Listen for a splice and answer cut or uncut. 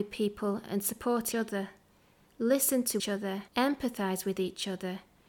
cut